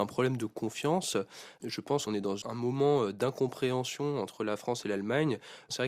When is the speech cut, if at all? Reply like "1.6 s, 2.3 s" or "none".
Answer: 2.1 s, 2.4 s